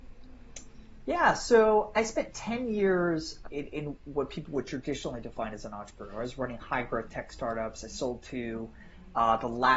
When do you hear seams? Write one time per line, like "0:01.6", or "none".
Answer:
0:01.9
0:03.4